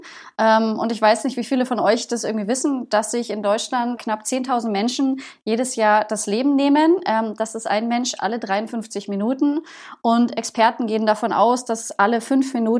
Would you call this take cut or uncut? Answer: cut